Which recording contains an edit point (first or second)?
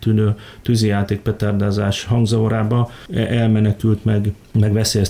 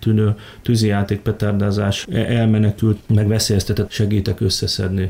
second